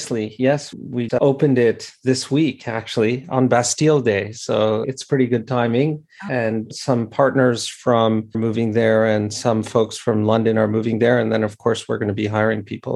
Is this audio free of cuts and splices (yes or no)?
no